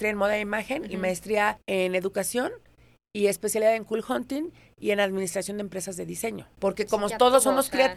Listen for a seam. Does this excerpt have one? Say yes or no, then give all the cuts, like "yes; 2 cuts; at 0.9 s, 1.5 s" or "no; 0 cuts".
no; 0 cuts